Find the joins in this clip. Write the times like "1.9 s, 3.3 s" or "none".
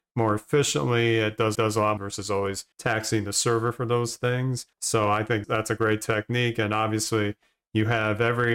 1.5 s, 2.0 s, 2.7 s, 4.7 s, 5.4 s

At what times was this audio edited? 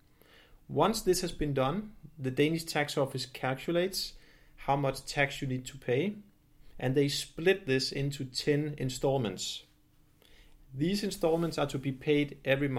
none

